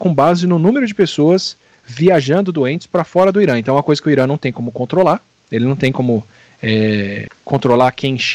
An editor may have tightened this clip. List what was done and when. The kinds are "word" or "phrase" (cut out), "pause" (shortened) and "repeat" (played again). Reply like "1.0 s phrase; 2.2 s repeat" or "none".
none